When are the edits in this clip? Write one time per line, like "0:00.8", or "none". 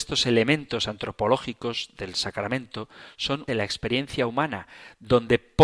0:03.5